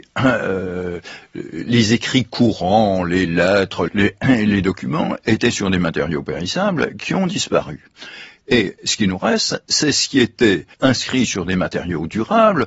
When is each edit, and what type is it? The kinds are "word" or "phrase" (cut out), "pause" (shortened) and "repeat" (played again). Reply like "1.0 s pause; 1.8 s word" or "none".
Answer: 3.9 s word; 10.7 s pause